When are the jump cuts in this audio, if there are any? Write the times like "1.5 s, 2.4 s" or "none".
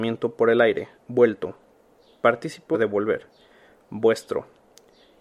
1.0 s, 2.7 s